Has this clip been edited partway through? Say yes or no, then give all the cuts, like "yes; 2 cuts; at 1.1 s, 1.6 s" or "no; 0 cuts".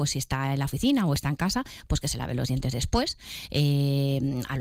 no; 0 cuts